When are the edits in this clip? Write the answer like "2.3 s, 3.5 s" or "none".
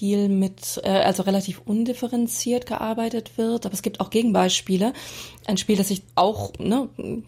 6.1 s